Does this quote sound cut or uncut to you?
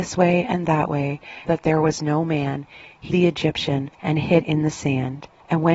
cut